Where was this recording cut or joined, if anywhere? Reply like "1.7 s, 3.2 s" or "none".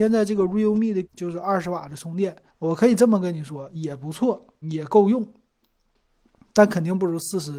1.0 s, 2.5 s, 4.6 s